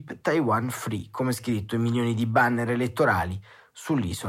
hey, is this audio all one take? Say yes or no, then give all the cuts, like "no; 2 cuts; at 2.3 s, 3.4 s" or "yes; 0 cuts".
yes; 0 cuts